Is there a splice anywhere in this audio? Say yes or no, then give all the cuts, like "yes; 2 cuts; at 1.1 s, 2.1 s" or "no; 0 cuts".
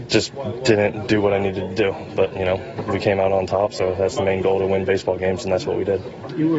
no; 0 cuts